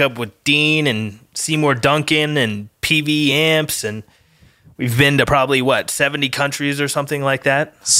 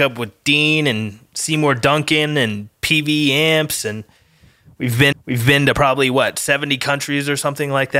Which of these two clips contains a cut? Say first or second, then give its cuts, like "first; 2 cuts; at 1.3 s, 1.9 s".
second; 1 cut; at 5.1 s